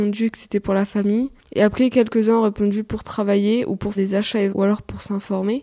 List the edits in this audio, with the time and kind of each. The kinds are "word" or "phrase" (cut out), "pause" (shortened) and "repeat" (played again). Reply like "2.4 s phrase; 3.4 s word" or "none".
3.9 s word; 4.5 s word